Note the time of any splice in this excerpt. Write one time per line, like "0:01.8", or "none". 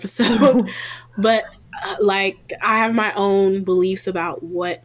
none